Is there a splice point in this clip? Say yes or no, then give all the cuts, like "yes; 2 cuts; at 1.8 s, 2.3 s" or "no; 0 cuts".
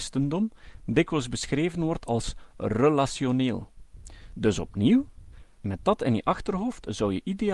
no; 0 cuts